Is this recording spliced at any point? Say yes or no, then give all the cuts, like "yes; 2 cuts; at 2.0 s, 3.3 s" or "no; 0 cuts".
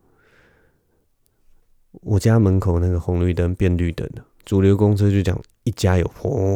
yes; 1 cut; at 4.3 s